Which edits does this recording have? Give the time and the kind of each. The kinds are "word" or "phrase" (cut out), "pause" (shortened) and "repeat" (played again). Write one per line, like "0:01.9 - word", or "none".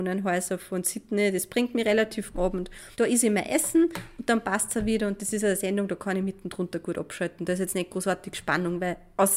0:02.3 - phrase
0:02.9 - pause